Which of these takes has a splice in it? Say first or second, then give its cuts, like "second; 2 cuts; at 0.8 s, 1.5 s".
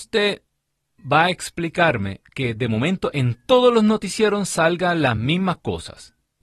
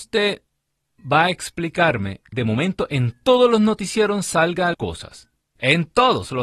second; 2 cuts; at 2.3 s, 4.7 s